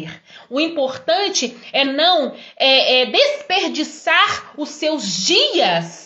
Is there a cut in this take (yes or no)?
no